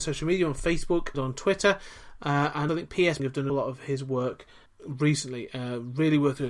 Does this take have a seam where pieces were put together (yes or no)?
yes